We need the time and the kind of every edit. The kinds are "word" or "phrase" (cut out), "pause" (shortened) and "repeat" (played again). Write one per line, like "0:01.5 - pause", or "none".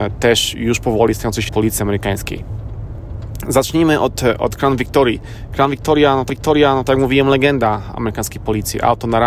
0:01.5 - word
0:06.3 - repeat